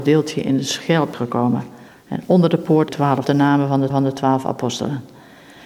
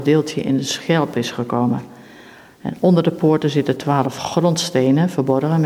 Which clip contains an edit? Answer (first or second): first